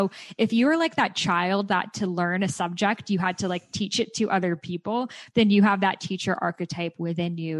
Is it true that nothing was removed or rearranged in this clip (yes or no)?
yes